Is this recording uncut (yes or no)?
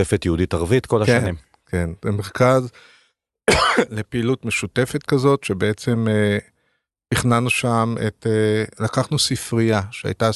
yes